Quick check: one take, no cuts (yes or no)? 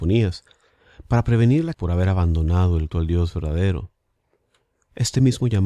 no